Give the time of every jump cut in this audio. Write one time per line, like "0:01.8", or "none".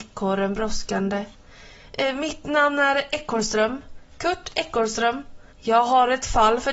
0:04.1
0:05.5